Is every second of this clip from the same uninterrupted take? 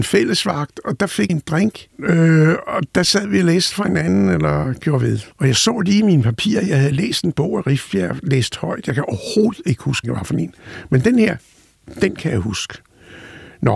no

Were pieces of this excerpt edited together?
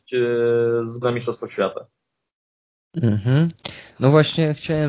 yes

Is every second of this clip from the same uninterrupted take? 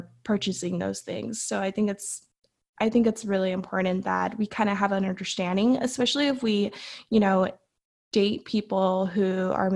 yes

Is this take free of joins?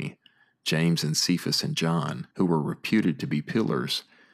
no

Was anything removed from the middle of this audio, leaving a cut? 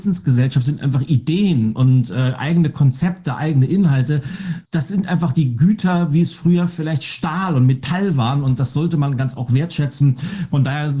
yes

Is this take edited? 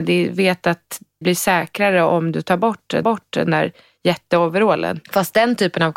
yes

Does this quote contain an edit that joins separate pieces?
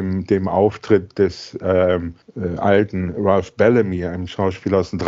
yes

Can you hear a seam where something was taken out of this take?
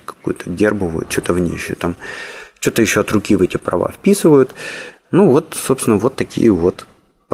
no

